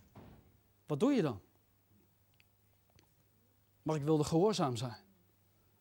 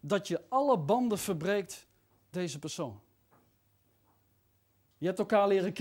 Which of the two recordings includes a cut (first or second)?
second